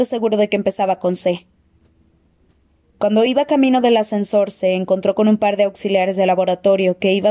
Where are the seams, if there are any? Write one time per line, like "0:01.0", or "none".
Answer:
none